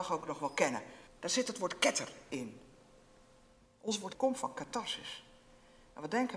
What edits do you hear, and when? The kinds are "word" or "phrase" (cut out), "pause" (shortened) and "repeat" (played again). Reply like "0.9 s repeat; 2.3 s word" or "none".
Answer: 1.1 s pause; 4.1 s word